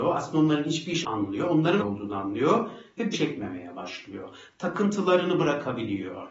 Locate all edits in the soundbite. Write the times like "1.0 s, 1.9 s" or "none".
1.0 s, 1.8 s, 3.1 s